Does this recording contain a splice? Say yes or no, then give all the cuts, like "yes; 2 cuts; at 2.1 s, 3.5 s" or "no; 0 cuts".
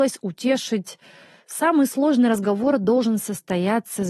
no; 0 cuts